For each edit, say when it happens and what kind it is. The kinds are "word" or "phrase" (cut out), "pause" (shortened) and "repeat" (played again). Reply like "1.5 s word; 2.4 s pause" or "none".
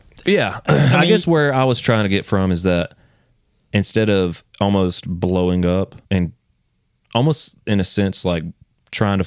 4.5 s pause; 6.0 s pause